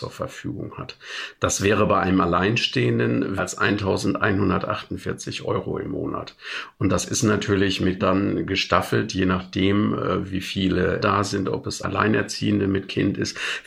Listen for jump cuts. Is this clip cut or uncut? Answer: cut